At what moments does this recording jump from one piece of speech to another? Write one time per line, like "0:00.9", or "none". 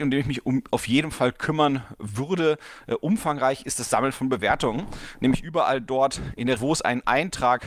0:06.6